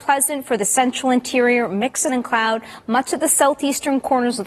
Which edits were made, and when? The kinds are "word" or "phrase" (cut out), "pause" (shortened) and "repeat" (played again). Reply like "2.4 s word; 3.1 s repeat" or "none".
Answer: 2.1 s word